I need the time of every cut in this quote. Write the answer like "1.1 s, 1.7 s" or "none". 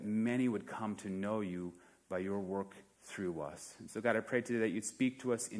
none